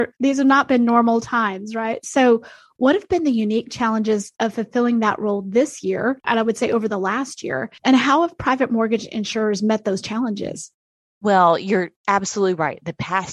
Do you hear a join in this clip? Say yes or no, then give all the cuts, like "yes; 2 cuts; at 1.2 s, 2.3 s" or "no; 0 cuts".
no; 0 cuts